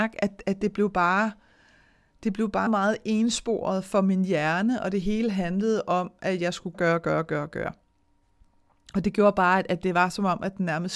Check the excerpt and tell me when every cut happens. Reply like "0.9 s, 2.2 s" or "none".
2.7 s, 6.7 s